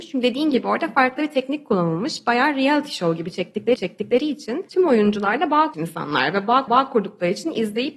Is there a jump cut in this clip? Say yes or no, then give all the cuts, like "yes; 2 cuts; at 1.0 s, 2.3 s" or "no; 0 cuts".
yes; 3 cuts; at 3.8 s, 5.7 s, 6.7 s